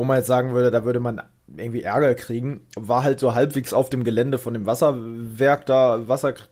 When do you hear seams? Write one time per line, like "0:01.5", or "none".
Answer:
none